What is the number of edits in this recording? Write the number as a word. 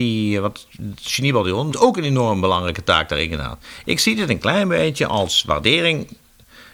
one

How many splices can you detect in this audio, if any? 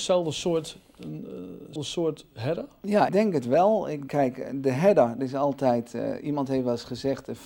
four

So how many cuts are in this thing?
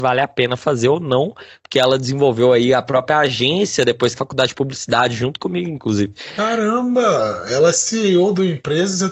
one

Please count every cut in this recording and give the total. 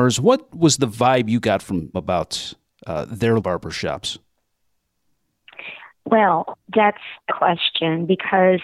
four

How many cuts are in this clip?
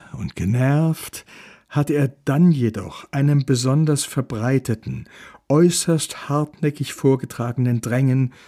zero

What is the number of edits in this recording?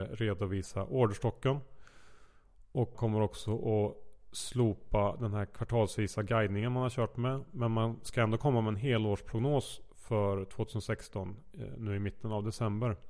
one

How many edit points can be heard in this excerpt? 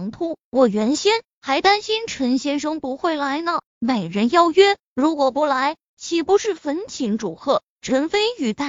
one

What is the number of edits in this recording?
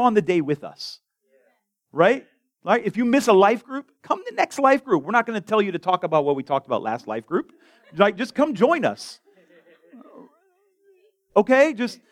zero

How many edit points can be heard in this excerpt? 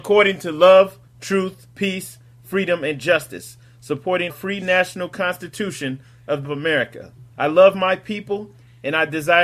four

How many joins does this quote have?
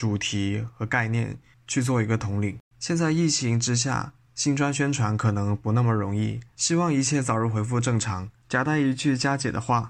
two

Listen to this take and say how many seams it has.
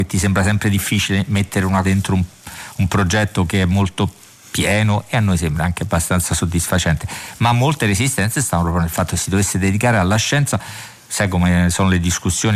one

